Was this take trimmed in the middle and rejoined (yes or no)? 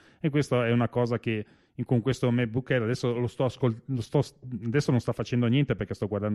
no